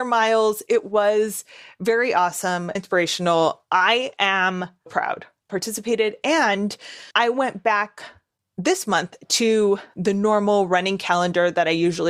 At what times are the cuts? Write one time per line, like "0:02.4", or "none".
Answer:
0:02.8
0:04.9
0:05.5
0:07.1